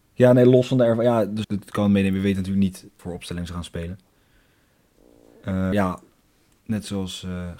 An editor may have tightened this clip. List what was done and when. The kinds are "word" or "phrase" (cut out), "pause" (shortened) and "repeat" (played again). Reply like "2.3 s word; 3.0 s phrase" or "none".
1.4 s word; 3.0 s word; 5.7 s word

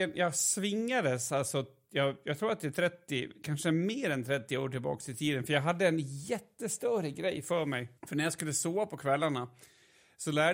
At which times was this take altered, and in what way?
8.0 s pause

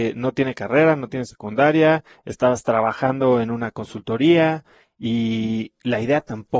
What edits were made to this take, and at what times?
none

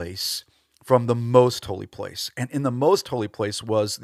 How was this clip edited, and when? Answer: none

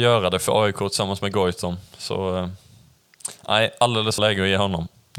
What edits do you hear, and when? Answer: 4.2 s phrase

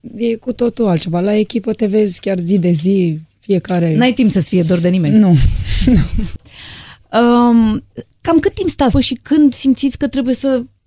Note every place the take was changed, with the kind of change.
8.9 s phrase

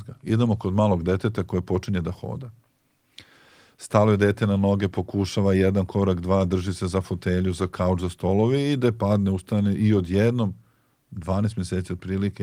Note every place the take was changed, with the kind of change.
none

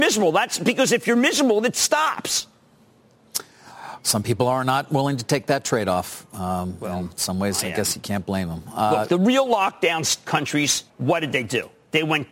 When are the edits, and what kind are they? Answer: 10.9 s pause

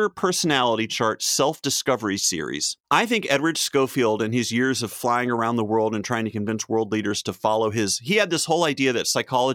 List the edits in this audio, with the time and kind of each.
2.8 s pause

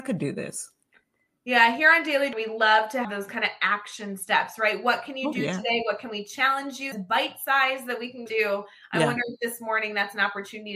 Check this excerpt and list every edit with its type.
2.3 s word; 3.0 s word; 6.9 s word; 8.3 s word

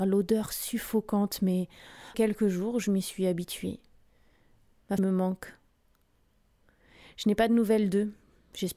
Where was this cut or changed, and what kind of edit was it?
2.1 s word; 5.0 s word

